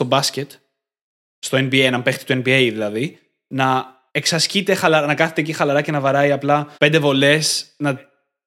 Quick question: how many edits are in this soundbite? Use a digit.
2